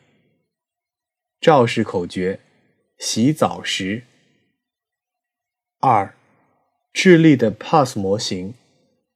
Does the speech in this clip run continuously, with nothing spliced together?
yes; 0 cuts

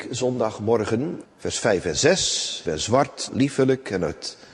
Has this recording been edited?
yes; 3 cuts; at 1.2 s, 2.6 s, 3.3 s

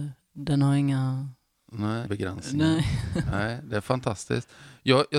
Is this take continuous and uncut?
no; 1 cut; at 2.1 s

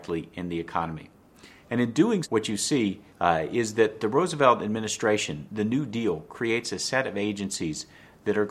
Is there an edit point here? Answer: yes; 3 cuts; at 2.2 s, 3.1 s, 5.5 s

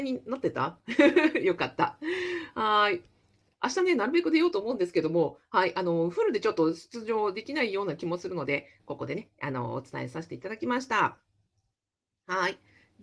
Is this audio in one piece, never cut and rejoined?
yes; 0 cuts

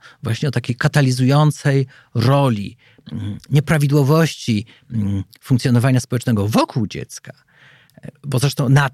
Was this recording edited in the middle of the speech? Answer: no; 0 cuts

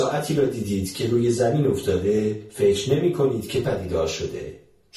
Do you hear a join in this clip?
yes; 1 cut; at 3.6 s

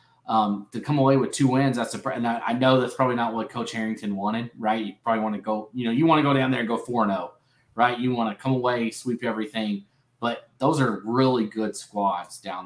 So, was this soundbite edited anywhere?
no; 0 cuts

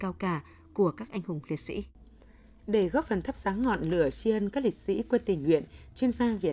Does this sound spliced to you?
no; 0 cuts

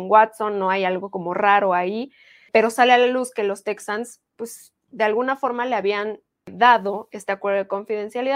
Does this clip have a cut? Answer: no; 0 cuts

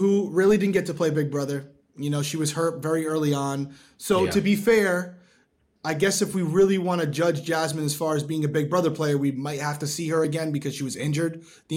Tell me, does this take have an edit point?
no; 0 cuts

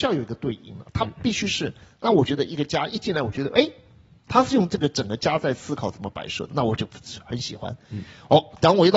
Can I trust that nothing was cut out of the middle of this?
yes; 0 cuts

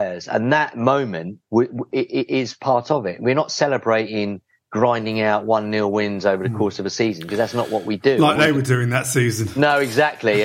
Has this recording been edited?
yes; 2 cuts; at 1.4 s, 8.4 s

